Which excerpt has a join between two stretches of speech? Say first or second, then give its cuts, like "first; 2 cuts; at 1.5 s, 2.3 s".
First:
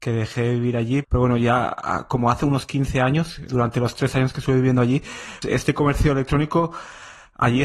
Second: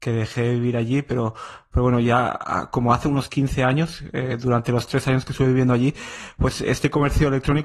first; 3 cuts; at 1.0 s, 3.5 s, 5.4 s